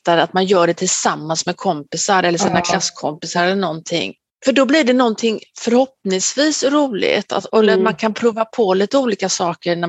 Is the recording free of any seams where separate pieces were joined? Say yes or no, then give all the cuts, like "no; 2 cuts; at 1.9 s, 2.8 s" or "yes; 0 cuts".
yes; 0 cuts